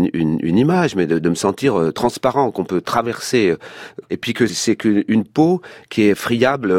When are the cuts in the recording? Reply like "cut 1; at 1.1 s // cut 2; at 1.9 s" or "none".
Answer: cut 1; at 4.5 s

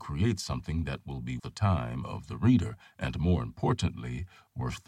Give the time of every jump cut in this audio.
cut 1; at 1.4 s

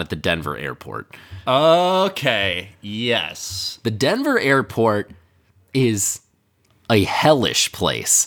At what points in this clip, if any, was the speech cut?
none

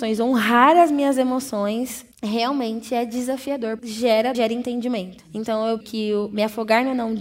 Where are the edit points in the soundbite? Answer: cut 1; at 2.1 s // cut 2; at 3.8 s // cut 3; at 4.3 s // cut 4; at 5.8 s

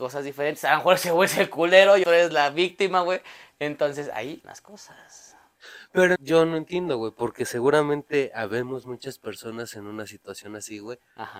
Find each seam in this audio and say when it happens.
cut 1; at 2.0 s // cut 2; at 4.4 s // cut 3; at 6.2 s

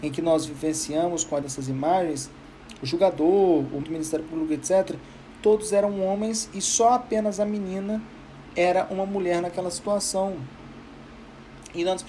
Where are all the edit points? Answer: cut 1; at 1.4 s // cut 2; at 3.8 s

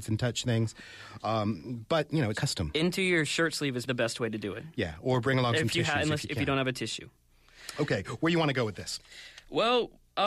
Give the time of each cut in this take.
cut 1; at 2.3 s // cut 2; at 3.9 s

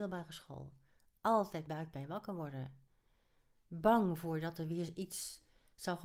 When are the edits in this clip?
cut 1; at 1.7 s

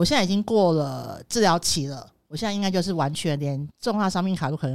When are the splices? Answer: cut 1; at 3.7 s

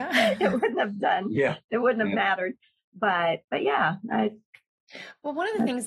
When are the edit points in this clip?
cut 1; at 3.4 s

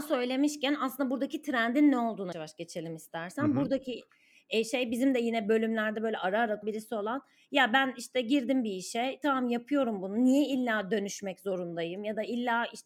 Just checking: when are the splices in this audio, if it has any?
cut 1; at 2.3 s // cut 2; at 6.6 s

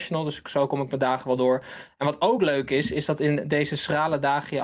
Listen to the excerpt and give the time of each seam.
none

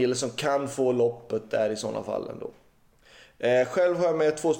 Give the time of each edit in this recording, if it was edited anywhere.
none

